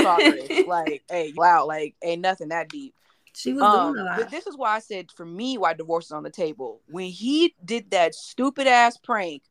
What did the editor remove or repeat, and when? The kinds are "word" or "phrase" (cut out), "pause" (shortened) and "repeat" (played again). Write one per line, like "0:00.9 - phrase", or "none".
0:01.4 - phrase